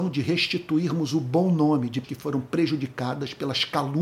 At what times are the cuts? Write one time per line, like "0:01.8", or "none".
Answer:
0:02.0